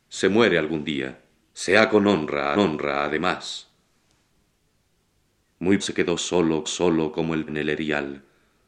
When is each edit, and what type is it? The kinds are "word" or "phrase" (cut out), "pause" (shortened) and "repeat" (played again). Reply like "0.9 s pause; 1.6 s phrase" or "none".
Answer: 1.4 s pause; 2.5 s repeat; 5.8 s word; 6.6 s repeat; 7.5 s word